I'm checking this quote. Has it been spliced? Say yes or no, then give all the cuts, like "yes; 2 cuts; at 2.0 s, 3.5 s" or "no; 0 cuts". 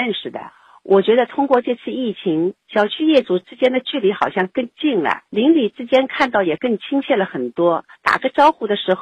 yes; 3 cuts; at 2.6 s, 5.3 s, 7.9 s